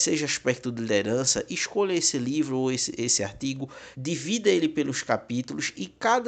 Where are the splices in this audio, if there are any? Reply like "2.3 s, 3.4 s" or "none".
3.9 s